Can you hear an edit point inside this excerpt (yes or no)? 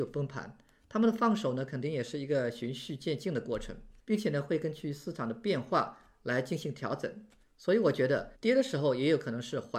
yes